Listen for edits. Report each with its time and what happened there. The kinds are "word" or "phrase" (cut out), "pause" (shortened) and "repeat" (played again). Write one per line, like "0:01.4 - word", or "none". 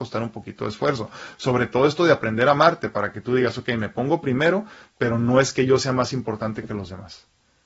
none

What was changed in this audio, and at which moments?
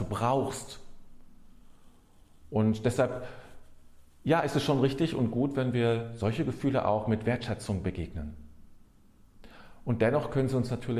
none

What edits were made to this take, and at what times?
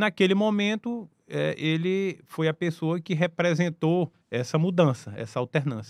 0:04.2 - pause

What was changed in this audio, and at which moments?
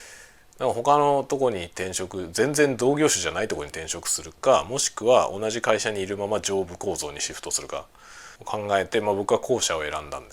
0:08.4 - pause

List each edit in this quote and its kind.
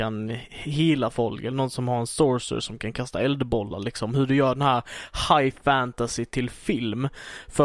none

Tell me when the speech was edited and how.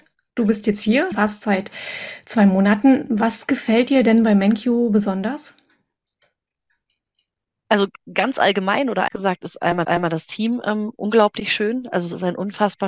0:01.1 - word
0:09.1 - word
0:09.8 - repeat

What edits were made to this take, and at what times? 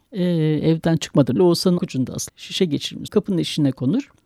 0:01.4 - word
0:01.8 - word
0:02.3 - word
0:03.1 - word

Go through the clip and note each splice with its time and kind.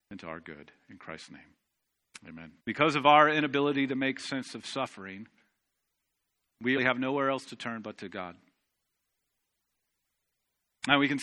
0:02.6 - pause
0:06.8 - word

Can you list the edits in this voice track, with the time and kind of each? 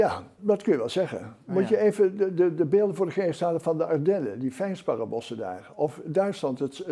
none

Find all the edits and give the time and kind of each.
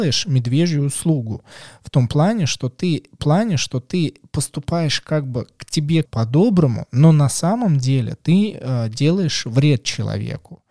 0:03.2 - repeat
0:06.1 - word

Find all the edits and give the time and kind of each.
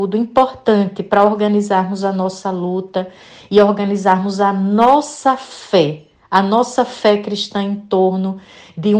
none

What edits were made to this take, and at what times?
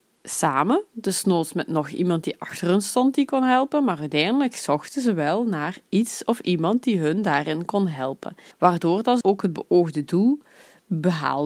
0:08.5 - pause
0:09.2 - phrase

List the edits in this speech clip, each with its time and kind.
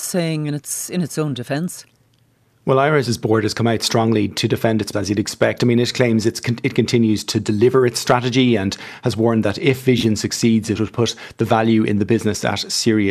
0:04.9 - word

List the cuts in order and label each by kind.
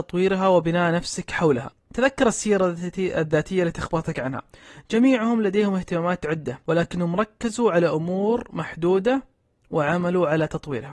none

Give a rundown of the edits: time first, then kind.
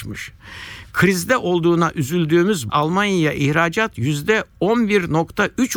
0:02.7 - phrase

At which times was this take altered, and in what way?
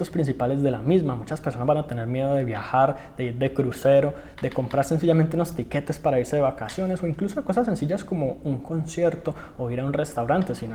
none

